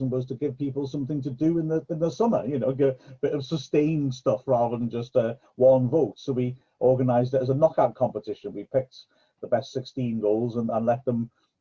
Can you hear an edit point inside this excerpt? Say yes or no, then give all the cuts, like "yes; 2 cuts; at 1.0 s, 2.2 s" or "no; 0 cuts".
no; 0 cuts